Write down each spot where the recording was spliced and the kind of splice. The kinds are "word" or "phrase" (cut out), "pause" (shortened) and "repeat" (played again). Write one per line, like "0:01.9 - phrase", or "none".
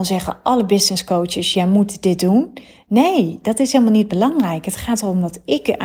none